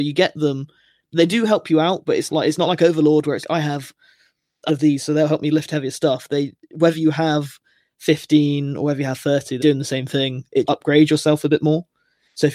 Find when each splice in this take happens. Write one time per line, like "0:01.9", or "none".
0:02.3
0:03.4
0:04.7
0:09.6
0:10.7